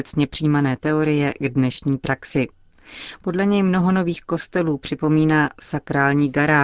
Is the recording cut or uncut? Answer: uncut